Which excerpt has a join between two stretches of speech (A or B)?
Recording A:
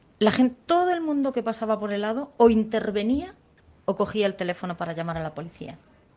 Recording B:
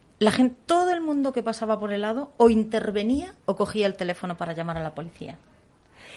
B